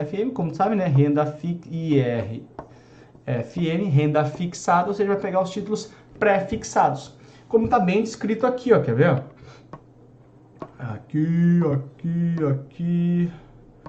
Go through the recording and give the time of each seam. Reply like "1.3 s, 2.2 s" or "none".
none